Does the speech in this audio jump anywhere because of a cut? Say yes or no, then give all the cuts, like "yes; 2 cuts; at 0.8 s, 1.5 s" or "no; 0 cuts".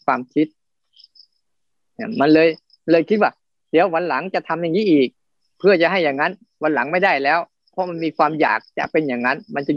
no; 0 cuts